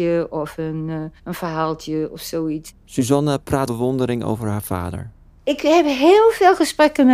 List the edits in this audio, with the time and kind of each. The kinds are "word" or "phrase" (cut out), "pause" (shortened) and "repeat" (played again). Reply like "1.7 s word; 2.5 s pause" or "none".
1.2 s pause; 3.7 s phrase

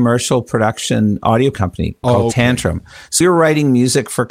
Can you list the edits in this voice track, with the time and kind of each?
1.5 s word; 2.0 s word; 3.2 s word

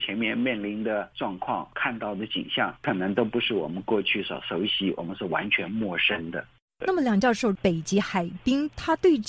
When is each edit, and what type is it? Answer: none

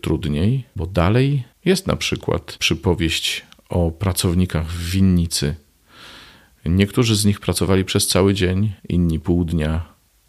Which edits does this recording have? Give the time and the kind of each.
8.8 s pause

